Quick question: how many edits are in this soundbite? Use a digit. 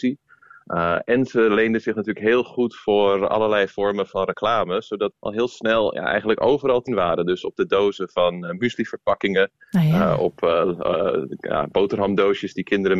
2